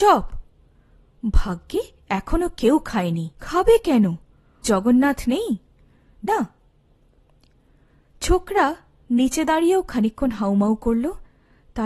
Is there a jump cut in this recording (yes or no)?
yes